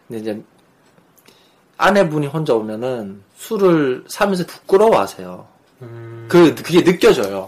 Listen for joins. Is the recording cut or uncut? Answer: cut